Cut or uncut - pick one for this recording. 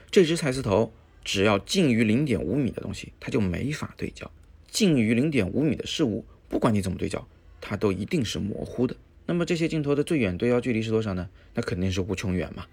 cut